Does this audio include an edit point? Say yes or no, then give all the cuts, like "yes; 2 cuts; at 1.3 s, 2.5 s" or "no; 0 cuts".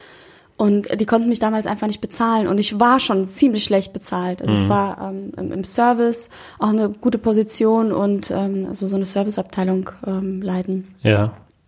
no; 0 cuts